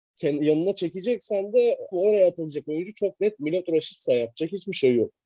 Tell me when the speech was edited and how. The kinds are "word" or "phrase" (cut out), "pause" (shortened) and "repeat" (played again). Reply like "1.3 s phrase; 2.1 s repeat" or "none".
1.9 s word